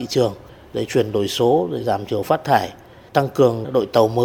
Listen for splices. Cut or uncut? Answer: uncut